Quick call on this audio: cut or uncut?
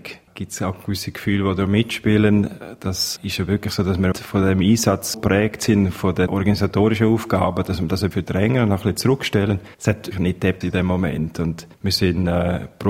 cut